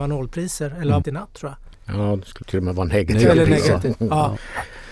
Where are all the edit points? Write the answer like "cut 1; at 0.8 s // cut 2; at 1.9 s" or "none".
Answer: cut 1; at 1.0 s // cut 2; at 2.4 s

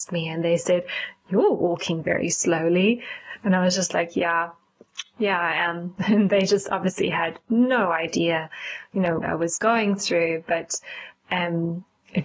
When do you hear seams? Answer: cut 1; at 9.2 s

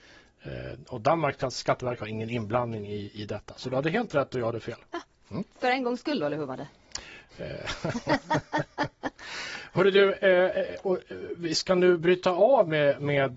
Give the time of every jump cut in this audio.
none

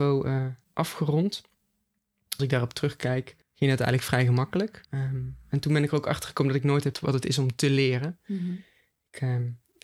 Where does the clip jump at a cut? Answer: cut 1; at 2.4 s // cut 2; at 3.4 s // cut 3; at 4.8 s // cut 4; at 6.9 s

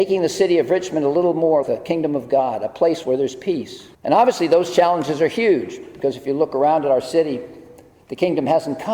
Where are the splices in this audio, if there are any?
cut 1; at 1.6 s // cut 2; at 3.0 s // cut 3; at 3.9 s

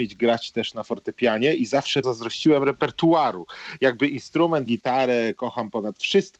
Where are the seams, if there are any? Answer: cut 1; at 2.0 s // cut 2; at 4.7 s

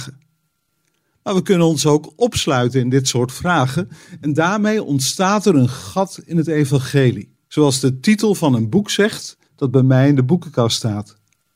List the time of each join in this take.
cut 1; at 7.4 s // cut 2; at 9.4 s

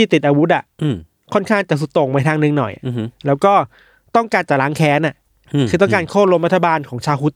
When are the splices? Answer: none

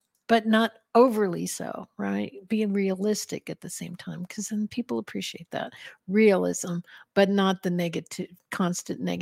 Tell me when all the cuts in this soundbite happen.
none

